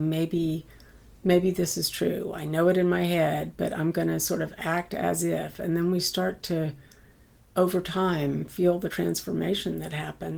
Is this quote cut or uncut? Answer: uncut